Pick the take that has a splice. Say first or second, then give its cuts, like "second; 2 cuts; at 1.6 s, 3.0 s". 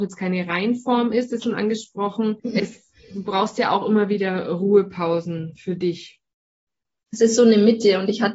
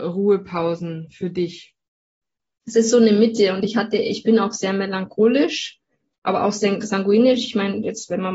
first; 2 cuts; at 1.4 s, 2.4 s